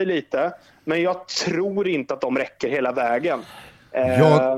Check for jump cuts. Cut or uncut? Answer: uncut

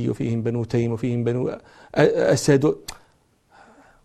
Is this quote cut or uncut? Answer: uncut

